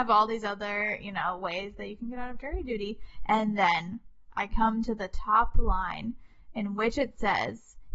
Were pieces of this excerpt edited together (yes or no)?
no